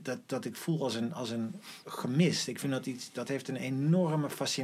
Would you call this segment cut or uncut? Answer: uncut